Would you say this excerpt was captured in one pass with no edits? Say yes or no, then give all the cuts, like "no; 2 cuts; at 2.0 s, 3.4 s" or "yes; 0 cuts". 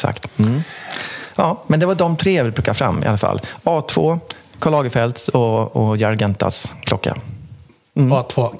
yes; 0 cuts